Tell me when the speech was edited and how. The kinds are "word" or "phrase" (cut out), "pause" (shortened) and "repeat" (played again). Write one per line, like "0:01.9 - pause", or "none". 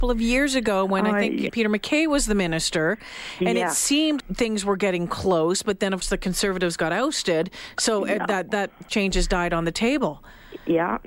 0:01.5 - word
0:04.2 - word
0:06.0 - word
0:08.9 - word